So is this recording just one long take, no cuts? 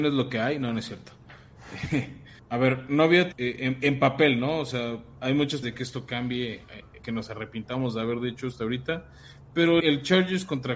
no; 5 cuts; at 2.4 s, 3.3 s, 5.6 s, 7.0 s, 9.8 s

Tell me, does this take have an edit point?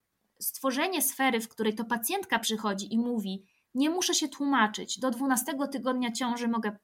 no; 0 cuts

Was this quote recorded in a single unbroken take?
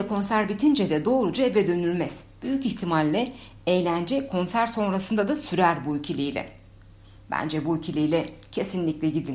yes; 0 cuts

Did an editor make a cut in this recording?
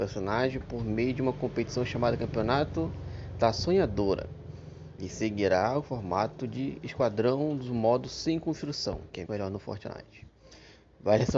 yes; 1 cut; at 9.3 s

